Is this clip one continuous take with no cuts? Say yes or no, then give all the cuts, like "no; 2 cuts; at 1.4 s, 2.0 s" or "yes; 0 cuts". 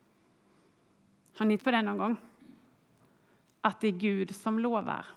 no; 1 cut; at 1.6 s